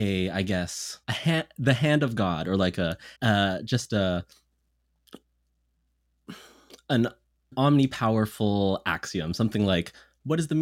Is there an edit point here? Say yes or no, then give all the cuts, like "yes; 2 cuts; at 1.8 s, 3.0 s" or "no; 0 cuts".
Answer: yes; 3 cuts; at 1.0 s, 3.2 s, 7.5 s